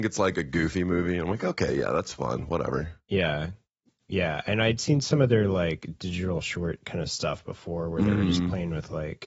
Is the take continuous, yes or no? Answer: yes